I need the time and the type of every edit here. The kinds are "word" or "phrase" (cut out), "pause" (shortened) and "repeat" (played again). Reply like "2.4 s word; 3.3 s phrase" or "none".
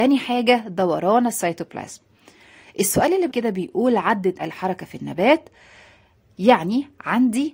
3.3 s word; 4.4 s word